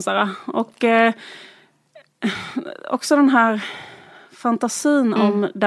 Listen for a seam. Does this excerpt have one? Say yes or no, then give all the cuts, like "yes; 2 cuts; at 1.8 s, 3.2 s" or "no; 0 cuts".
no; 0 cuts